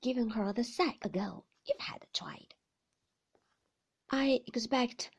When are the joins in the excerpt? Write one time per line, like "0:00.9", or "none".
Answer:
0:01.0
0:01.8